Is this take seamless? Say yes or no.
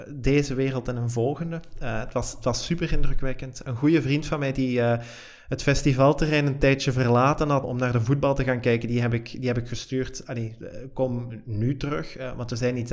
no